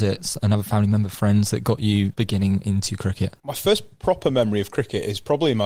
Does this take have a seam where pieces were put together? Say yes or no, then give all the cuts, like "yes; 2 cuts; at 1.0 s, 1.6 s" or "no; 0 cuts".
yes; 1 cut; at 3.4 s